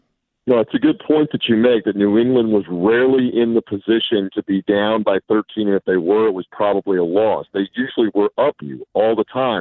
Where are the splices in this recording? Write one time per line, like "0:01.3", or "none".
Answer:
0:08.6